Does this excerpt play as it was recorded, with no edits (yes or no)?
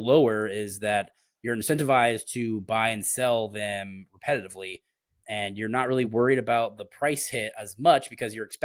yes